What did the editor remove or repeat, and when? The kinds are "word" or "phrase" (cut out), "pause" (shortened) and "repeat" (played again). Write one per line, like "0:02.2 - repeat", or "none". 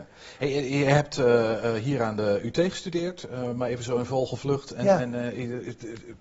none